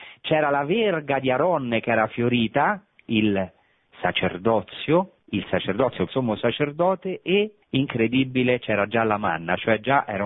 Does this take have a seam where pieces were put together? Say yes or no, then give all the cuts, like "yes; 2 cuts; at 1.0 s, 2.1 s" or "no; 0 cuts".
yes; 4 cuts; at 3.1 s, 5.2 s, 6.1 s, 7.6 s